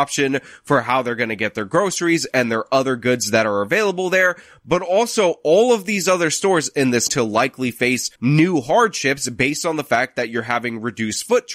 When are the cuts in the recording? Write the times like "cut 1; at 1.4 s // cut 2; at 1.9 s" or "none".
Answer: cut 1; at 7.1 s // cut 2; at 8.2 s